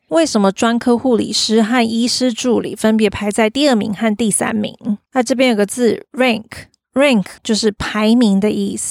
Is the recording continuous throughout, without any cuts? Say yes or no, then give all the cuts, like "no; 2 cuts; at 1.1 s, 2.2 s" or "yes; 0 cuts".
no; 2 cuts; at 5.1 s, 7.4 s